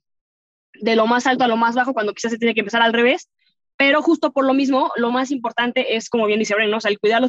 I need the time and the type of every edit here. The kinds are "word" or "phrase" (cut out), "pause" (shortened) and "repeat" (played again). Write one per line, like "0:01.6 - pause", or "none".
none

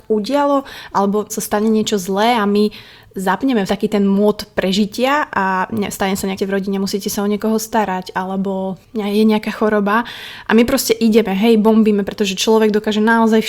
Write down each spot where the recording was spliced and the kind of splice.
0:01.3 - word
0:03.7 - word
0:06.4 - word

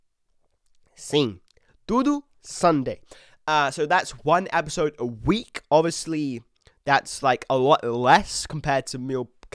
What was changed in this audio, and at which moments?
none

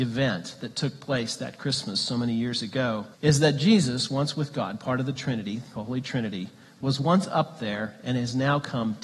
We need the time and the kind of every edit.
0:03.1 - pause

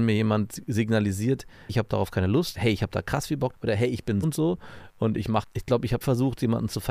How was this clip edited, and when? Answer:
0:01.7 - word
0:02.5 - word
0:03.5 - word
0:04.2 - word
0:05.4 - word
0:06.0 - word

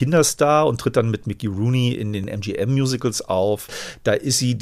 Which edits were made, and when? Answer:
none

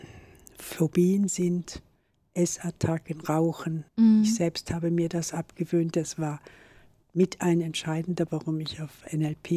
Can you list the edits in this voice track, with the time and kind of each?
0:03.9 - pause
0:08.3 - word

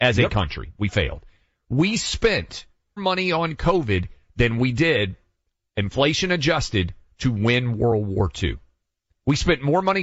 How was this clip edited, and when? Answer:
0:03.0 - word

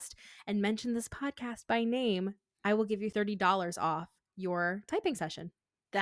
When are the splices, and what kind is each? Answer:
none

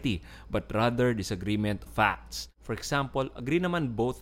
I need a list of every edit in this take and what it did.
0:01.9 - word

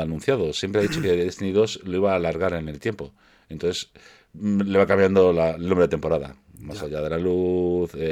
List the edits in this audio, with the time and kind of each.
none

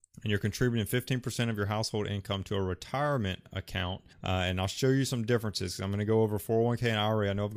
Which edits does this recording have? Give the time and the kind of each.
0:04.1 - pause

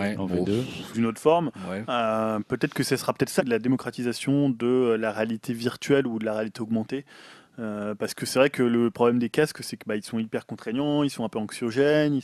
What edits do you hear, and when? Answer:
0:00.9 - word
0:03.4 - word

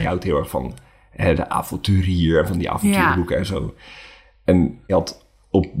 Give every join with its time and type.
0:04.9 - word

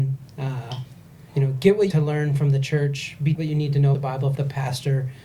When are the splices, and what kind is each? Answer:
0:01.3 - pause
0:01.9 - phrase
0:03.3 - word
0:03.9 - word
0:04.3 - word

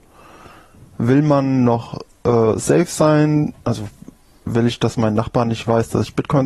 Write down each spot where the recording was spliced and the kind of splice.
0:03.6 - pause

